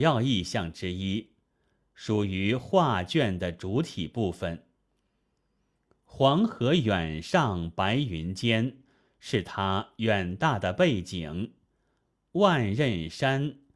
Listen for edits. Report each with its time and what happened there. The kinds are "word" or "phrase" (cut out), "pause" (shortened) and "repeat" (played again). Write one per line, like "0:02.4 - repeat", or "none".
none